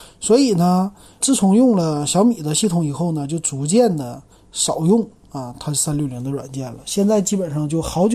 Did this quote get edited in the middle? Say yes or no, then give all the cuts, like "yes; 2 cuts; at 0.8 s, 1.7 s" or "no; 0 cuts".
yes; 1 cut; at 1.2 s